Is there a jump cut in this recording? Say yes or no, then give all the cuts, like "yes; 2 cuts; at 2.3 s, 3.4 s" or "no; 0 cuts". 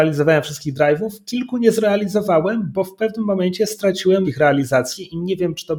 yes; 1 cut; at 4.2 s